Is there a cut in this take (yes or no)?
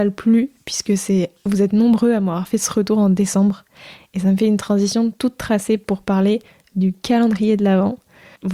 no